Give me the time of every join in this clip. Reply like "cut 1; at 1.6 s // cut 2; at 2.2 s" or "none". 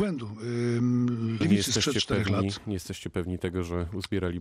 cut 1; at 1.4 s